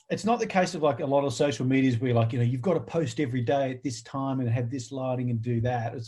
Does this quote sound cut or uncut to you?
uncut